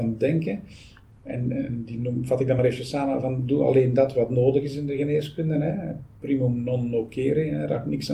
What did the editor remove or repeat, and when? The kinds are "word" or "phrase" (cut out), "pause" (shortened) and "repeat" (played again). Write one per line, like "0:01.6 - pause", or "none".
none